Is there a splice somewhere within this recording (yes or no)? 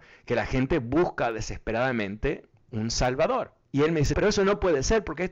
yes